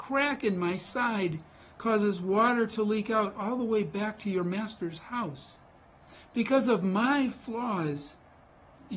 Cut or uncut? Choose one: uncut